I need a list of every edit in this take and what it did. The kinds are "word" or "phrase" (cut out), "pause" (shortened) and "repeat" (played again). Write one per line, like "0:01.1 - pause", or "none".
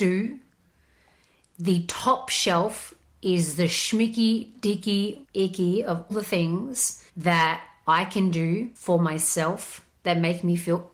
0:05.2 - word
0:06.1 - word
0:07.1 - pause
0:08.8 - pause